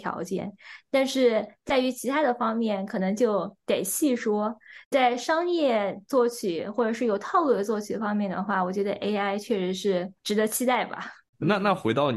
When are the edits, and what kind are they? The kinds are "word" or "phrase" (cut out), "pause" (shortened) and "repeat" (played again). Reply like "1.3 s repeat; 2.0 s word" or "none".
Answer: 10.2 s pause